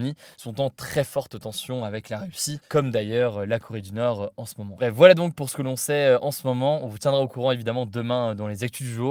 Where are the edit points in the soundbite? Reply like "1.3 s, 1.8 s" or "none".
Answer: none